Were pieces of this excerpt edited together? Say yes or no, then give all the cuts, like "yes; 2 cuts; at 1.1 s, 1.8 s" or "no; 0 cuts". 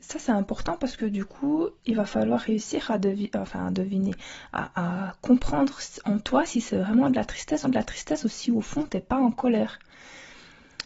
yes; 2 cuts; at 1.8 s, 7.6 s